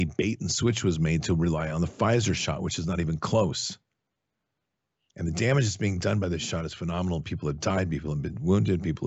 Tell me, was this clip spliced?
no; 0 cuts

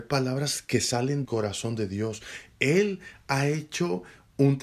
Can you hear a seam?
yes; 1 cut; at 1.2 s

